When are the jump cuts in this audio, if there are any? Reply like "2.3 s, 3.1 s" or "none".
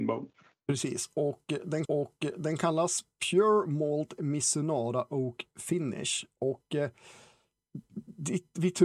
1.8 s